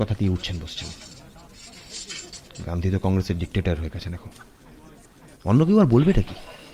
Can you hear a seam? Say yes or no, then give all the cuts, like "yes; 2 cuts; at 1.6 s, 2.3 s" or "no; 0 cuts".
no; 0 cuts